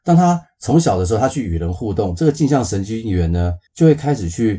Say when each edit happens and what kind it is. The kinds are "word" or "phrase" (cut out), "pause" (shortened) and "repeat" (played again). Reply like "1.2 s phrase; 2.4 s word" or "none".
3.7 s pause